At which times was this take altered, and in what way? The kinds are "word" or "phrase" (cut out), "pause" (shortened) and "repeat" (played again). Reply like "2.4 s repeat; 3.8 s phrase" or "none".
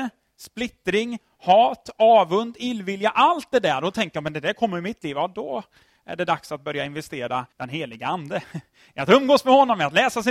7.5 s word